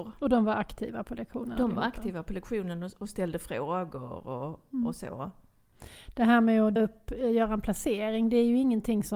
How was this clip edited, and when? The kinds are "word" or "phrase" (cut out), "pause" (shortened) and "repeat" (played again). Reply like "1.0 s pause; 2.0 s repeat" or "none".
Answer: 6.8 s word